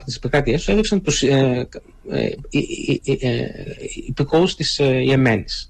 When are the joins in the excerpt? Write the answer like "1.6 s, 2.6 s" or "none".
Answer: 1.1 s

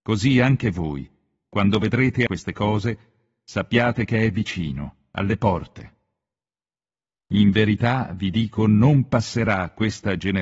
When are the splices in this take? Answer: 2.3 s

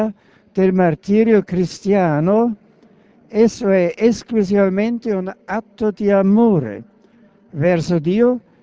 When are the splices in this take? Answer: none

